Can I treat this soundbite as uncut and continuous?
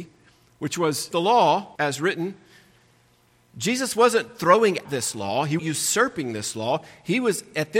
no; 4 cuts; at 1.1 s, 1.8 s, 4.8 s, 5.6 s

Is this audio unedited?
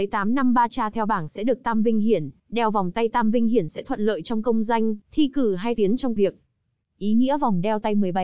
no; 4 cuts; at 2.4 s, 5.0 s, 5.8 s, 6.2 s

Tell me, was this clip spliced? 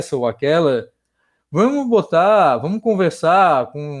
no; 0 cuts

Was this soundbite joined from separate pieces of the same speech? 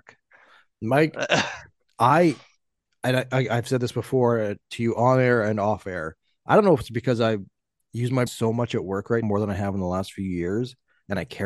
yes; 2 cuts; at 8.3 s, 9.2 s

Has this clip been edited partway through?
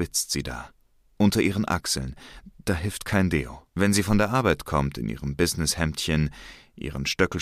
yes; 1 cut; at 3.7 s

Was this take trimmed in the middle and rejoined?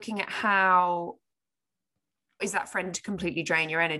yes; 2 cuts; at 2.4 s, 2.9 s

